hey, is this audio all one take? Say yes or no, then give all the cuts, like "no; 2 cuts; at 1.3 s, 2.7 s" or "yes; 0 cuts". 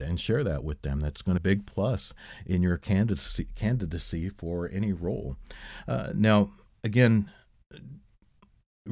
no; 1 cut; at 1.4 s